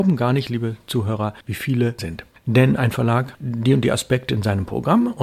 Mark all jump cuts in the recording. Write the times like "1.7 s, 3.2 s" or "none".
2.0 s, 3.3 s